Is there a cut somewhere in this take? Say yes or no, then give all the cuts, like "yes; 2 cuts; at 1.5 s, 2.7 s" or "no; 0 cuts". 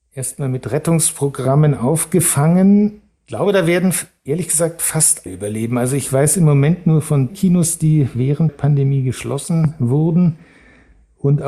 yes; 3 cuts; at 5.3 s, 7.3 s, 8.5 s